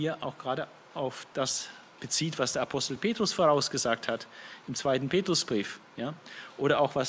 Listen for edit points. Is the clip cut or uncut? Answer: uncut